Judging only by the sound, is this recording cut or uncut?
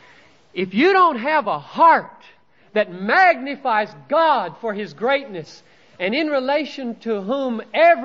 uncut